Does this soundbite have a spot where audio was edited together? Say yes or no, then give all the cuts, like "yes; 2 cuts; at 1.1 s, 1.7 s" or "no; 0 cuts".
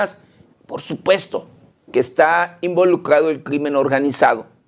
no; 0 cuts